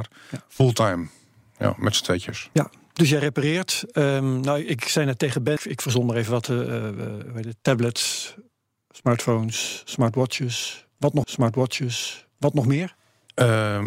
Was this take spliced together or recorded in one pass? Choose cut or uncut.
cut